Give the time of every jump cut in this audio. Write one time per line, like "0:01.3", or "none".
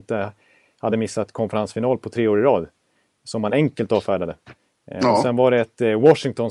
none